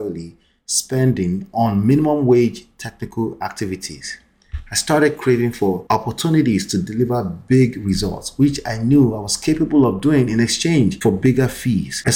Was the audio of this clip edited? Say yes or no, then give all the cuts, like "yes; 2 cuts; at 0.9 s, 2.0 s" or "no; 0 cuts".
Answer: no; 0 cuts